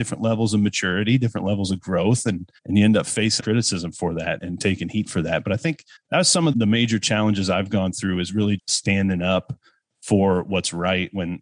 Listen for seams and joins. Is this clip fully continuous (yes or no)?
no